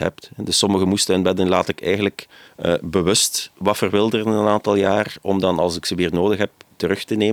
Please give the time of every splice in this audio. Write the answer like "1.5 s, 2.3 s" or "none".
2.5 s